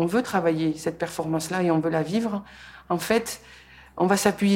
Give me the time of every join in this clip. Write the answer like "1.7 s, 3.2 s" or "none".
none